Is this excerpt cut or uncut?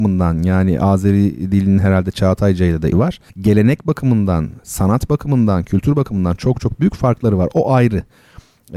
cut